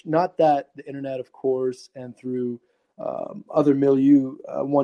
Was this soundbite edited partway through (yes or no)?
no